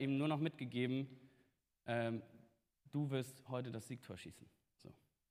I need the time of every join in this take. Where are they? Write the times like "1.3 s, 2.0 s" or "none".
none